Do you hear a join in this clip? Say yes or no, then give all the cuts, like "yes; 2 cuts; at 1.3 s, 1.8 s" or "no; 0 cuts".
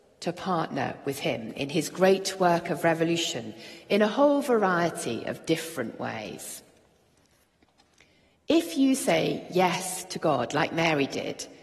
no; 0 cuts